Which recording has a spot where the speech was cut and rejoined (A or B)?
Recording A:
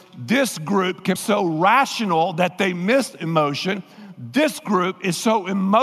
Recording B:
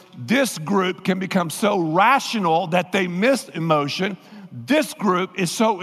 A